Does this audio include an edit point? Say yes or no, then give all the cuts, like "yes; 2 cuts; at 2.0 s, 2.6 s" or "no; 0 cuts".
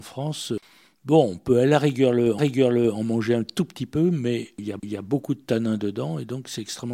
yes; 2 cuts; at 2.4 s, 4.8 s